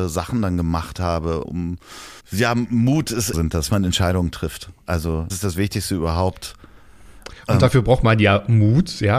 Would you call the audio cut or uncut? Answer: cut